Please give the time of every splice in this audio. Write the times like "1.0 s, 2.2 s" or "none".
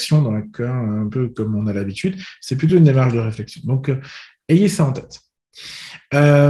none